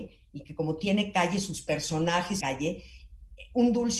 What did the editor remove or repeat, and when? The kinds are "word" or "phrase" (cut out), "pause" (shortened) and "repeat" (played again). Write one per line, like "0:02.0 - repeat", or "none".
0:02.4 - phrase